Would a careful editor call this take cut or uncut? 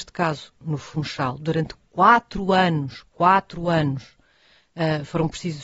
uncut